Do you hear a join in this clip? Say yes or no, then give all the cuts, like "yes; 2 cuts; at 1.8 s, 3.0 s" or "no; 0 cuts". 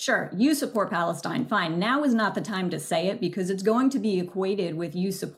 no; 0 cuts